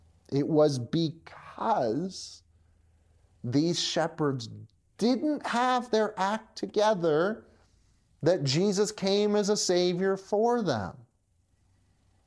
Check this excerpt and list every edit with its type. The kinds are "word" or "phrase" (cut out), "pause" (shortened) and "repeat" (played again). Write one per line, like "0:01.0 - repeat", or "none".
none